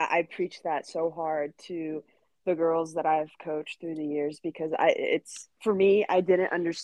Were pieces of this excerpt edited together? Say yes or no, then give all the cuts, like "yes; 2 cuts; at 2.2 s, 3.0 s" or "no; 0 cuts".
no; 0 cuts